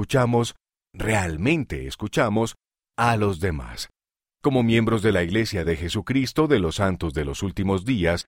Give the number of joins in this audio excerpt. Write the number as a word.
zero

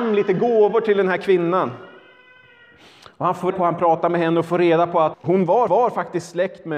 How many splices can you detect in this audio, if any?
three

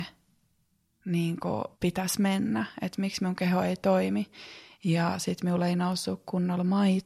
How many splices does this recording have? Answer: one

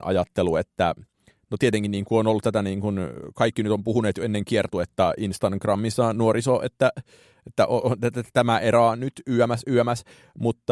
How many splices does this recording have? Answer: zero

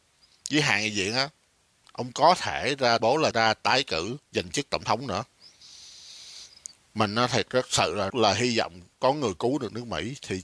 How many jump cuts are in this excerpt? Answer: six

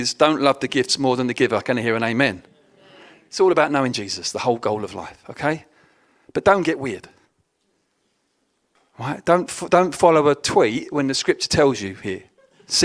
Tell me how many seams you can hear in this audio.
zero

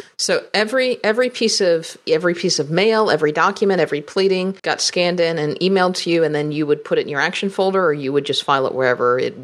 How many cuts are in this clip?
one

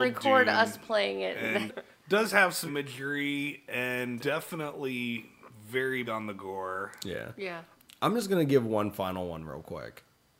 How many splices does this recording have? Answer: four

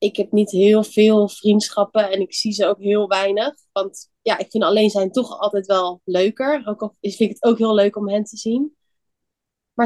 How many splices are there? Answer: one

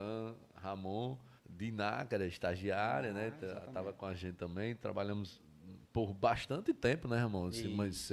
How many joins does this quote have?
one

